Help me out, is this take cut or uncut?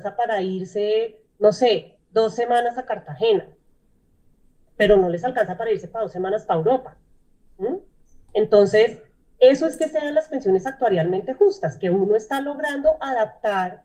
uncut